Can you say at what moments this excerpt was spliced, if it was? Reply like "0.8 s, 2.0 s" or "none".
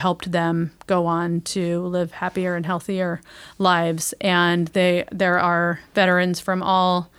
none